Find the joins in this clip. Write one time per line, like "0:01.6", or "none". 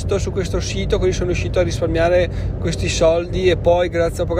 none